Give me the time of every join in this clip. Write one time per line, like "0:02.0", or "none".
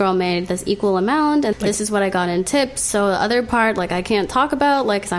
0:01.5